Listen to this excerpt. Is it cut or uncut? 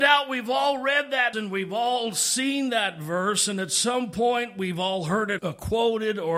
cut